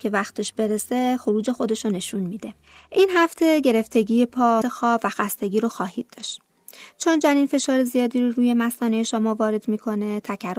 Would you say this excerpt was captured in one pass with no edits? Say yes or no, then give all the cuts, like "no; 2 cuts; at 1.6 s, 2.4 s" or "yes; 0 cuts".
no; 1 cut; at 4.6 s